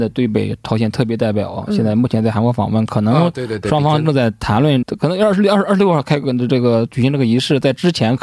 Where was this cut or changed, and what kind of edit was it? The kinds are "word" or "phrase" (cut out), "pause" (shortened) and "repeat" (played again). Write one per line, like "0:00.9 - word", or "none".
0:04.8 - word